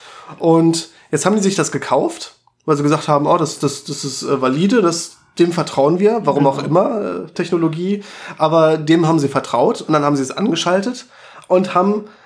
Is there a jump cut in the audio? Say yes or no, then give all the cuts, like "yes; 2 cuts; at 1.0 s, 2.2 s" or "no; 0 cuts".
no; 0 cuts